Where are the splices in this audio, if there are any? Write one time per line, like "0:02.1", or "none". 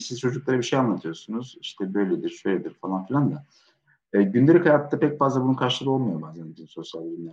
none